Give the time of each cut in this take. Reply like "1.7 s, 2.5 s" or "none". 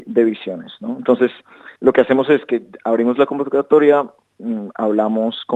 1.8 s